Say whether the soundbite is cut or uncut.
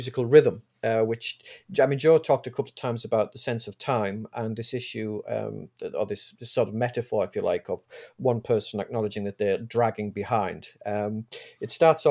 uncut